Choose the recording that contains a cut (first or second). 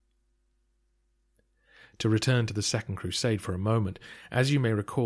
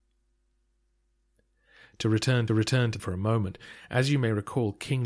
second